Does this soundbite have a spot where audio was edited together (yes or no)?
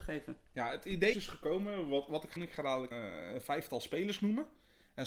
yes